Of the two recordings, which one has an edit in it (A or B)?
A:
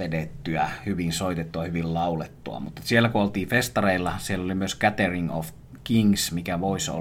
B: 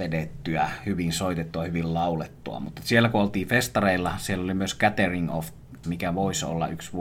B